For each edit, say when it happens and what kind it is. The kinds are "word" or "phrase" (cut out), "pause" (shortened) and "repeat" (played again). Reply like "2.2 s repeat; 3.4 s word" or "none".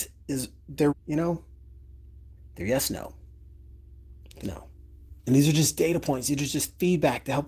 0.9 s word; 2.4 s pause; 4.4 s word; 5.2 s pause